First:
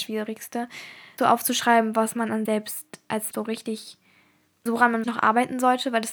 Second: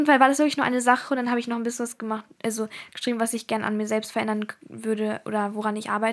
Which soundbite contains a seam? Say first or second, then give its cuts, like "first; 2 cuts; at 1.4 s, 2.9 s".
first; 5 cuts; at 1.2 s, 2.4 s, 3.3 s, 4.7 s, 5.0 s